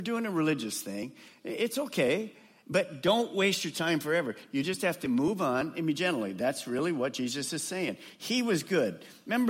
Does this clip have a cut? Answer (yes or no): no